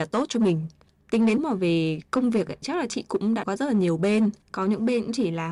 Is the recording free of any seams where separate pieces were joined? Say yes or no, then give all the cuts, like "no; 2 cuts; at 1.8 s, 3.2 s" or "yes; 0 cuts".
no; 4 cuts; at 1.4 s, 2.6 s, 3.4 s, 4.4 s